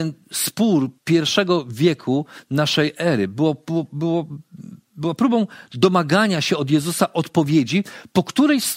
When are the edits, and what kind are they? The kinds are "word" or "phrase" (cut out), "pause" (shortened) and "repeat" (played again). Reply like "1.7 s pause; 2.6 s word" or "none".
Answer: 1.0 s pause